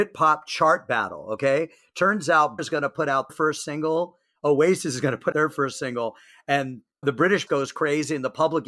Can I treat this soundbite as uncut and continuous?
no; 5 cuts; at 2.6 s, 3.3 s, 5.3 s, 7.0 s, 7.5 s

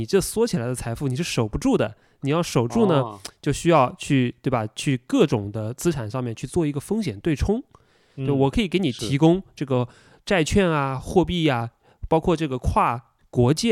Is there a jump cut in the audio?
no; 0 cuts

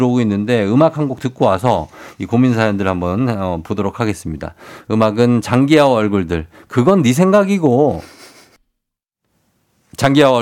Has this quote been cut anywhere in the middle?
no; 0 cuts

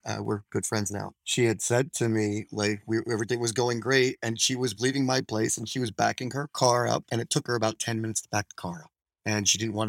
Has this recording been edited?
no; 0 cuts

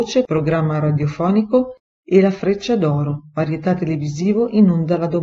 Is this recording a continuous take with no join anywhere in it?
yes; 0 cuts

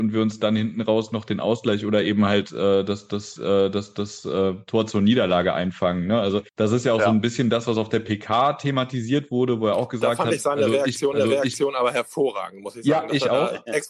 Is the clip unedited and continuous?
no; 3 cuts; at 3.4 s, 6.5 s, 11.1 s

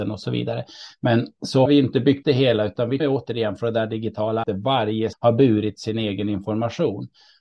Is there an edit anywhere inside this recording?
yes; 5 cuts; at 1.7 s, 2.2 s, 3.0 s, 4.4 s, 5.1 s

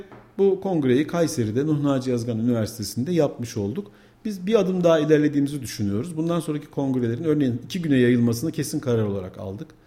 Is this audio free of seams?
yes; 0 cuts

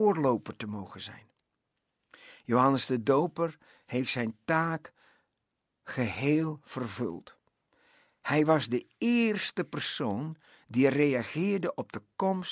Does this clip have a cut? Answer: no; 0 cuts

